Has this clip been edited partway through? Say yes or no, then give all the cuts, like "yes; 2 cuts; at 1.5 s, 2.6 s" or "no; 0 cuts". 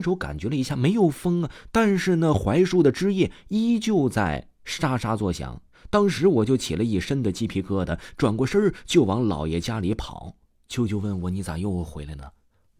yes; 2 cuts; at 5.7 s, 10.6 s